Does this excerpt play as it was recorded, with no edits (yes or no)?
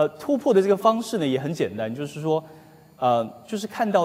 yes